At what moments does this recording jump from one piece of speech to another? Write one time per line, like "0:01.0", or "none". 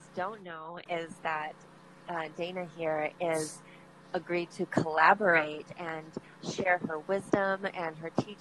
none